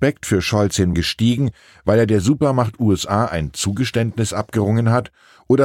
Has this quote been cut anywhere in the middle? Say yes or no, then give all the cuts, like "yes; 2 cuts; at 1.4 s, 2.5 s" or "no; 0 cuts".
yes; 1 cut; at 0.9 s